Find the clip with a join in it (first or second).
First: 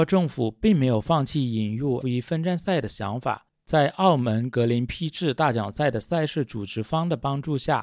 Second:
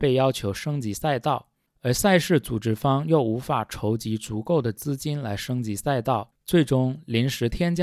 first